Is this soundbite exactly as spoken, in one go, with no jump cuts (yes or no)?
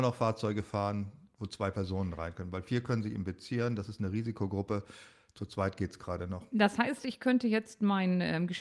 yes